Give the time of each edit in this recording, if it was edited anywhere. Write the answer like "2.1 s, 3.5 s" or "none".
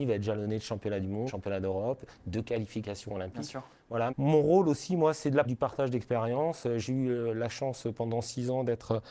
1.3 s, 4.1 s, 5.4 s